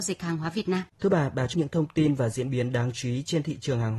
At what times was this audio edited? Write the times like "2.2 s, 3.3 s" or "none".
0.9 s, 1.5 s